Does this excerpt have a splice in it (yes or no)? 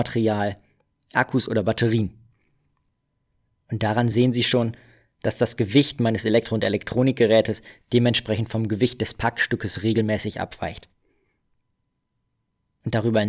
no